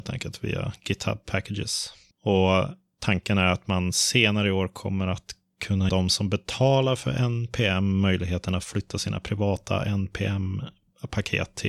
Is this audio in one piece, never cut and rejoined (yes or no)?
no